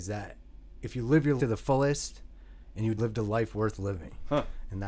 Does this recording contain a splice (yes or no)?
yes